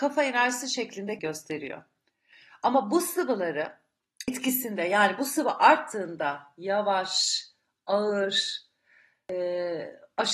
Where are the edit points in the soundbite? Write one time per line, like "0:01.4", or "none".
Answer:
0:01.2